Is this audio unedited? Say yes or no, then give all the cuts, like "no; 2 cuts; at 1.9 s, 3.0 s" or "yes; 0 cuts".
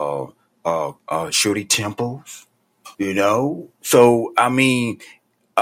no; 2 cuts; at 1.0 s, 2.9 s